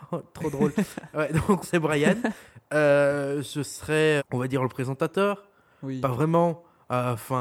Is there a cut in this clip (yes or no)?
yes